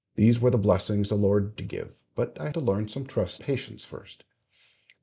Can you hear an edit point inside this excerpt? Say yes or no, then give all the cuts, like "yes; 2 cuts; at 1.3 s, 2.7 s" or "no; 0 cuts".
yes; 3 cuts; at 1.6 s, 2.5 s, 3.4 s